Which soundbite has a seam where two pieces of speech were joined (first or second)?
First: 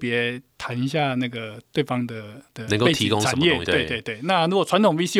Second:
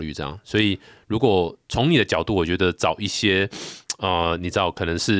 first